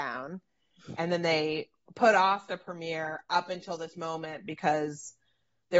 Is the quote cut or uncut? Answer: uncut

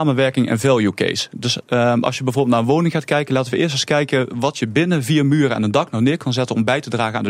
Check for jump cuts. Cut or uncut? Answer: uncut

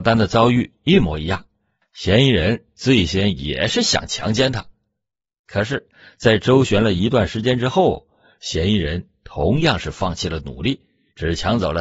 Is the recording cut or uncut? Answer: uncut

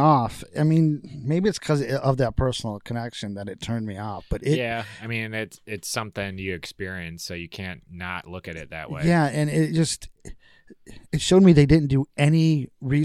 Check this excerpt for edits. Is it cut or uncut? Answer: uncut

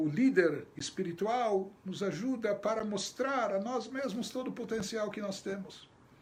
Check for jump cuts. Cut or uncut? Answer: uncut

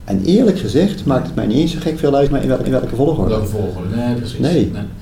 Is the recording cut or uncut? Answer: cut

